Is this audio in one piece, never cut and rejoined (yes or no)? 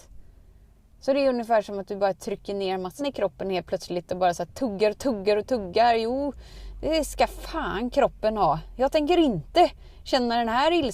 no